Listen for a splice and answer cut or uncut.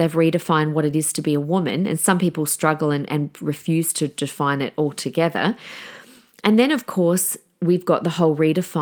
uncut